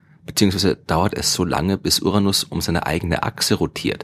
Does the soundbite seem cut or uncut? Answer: uncut